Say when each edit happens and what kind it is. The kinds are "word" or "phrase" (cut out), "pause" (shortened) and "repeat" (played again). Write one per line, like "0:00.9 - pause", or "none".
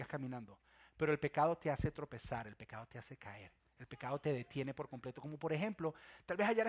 0:03.6 - pause